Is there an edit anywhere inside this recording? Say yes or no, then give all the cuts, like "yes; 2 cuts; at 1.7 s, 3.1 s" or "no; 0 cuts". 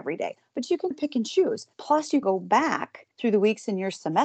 yes; 4 cuts; at 0.9 s, 1.7 s, 2.2 s, 3.1 s